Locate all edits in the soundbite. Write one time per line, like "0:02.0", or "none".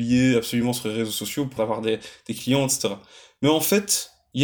0:01.6